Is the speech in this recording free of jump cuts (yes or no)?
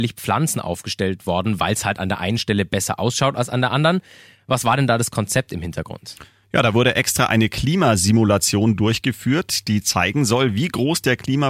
yes